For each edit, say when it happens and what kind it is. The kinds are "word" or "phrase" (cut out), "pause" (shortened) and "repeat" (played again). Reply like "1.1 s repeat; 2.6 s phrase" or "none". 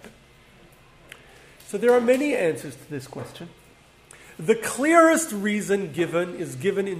none